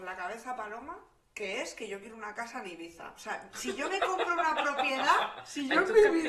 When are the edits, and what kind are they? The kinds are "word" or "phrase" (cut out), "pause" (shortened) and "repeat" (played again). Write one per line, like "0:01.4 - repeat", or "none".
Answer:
none